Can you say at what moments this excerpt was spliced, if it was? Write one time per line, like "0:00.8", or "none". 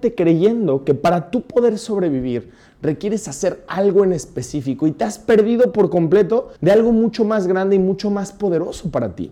0:06.6